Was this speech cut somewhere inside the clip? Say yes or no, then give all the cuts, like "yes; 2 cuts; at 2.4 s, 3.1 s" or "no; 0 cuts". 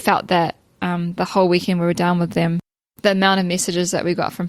no; 0 cuts